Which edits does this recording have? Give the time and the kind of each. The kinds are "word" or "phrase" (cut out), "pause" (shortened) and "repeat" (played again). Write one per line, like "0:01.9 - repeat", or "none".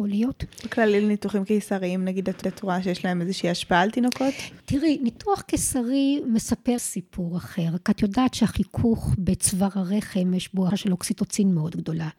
0:02.4 - repeat
0:06.8 - word
0:10.7 - word